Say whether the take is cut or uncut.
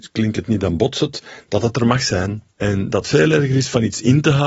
cut